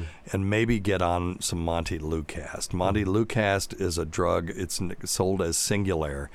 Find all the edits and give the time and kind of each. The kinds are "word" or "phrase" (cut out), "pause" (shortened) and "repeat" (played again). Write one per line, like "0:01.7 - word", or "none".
none